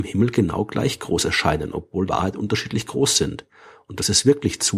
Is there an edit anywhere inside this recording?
yes; 1 cut; at 2.1 s

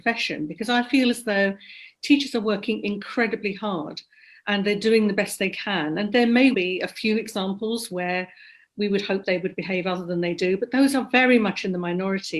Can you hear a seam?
yes; 1 cut; at 6.5 s

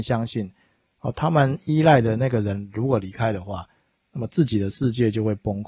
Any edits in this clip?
no; 0 cuts

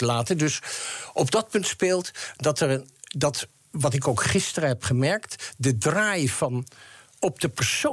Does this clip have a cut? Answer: no; 0 cuts

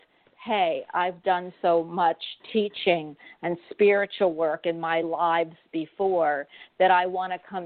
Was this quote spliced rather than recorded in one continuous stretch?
no; 0 cuts

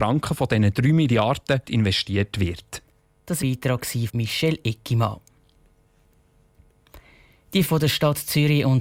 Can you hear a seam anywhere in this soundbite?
yes; 4 cuts; at 1.6 s, 3.4 s, 4.1 s, 7.7 s

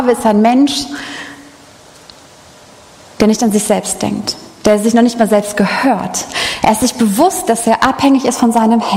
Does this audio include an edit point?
no; 0 cuts

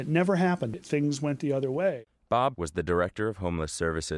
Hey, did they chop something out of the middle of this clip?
yes; 1 cut; at 2.5 s

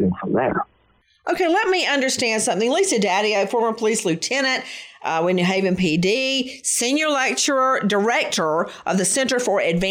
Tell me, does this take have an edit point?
no; 0 cuts

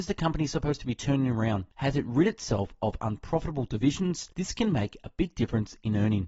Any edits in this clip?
yes; 2 cuts; at 1.7 s, 4.3 s

